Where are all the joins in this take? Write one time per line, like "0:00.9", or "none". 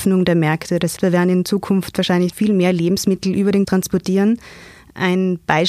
0:01.0
0:02.3
0:03.6